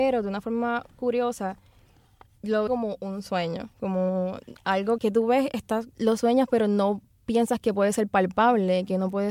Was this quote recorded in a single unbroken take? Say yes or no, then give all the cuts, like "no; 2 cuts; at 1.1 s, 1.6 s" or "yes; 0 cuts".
no; 4 cuts; at 2.7 s, 3.7 s, 5.0 s, 5.9 s